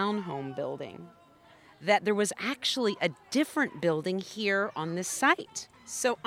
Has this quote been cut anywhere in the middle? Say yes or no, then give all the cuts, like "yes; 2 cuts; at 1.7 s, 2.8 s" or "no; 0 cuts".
no; 0 cuts